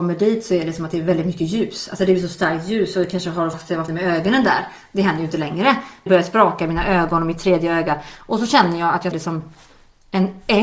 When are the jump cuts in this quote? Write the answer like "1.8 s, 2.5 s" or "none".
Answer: 3.5 s, 3.9 s, 6.1 s, 9.1 s